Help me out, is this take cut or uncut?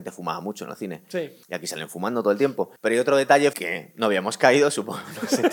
cut